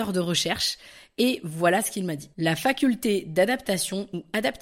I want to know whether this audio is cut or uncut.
cut